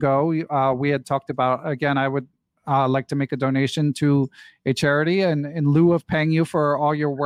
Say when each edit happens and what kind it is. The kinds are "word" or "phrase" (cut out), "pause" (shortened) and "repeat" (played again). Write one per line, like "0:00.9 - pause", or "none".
none